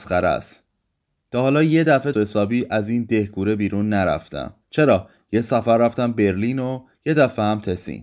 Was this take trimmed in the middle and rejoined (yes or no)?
yes